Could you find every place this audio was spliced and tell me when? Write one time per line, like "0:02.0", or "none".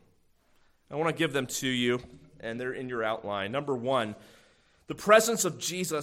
none